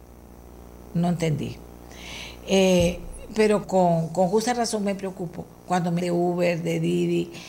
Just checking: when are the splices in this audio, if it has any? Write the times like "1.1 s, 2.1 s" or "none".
3.6 s, 6.0 s